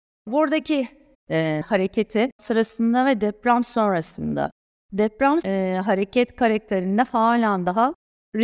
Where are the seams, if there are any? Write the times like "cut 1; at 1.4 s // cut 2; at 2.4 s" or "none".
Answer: cut 1; at 1.1 s // cut 2; at 1.6 s // cut 3; at 2.4 s // cut 4; at 5.4 s